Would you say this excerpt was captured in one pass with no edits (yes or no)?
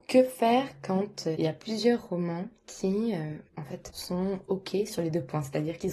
no